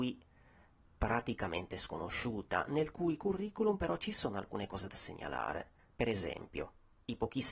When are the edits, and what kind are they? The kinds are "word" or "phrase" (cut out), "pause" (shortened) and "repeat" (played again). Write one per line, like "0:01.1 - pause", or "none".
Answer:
0:05.8 - pause